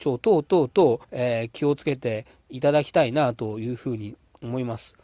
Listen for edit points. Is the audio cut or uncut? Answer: cut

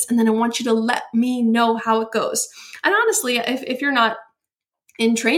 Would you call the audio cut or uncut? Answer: uncut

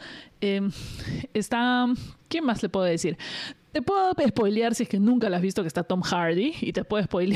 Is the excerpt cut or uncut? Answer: uncut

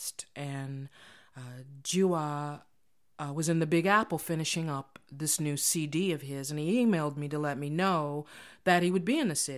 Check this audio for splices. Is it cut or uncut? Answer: uncut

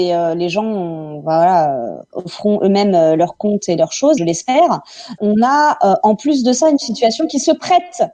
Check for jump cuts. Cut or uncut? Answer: cut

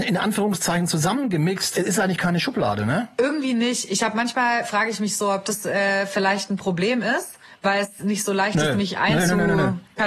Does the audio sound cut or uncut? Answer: uncut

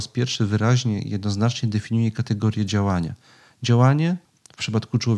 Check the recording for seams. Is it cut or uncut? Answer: cut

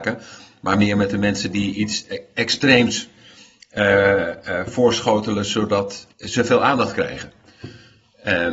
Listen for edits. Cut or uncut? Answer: cut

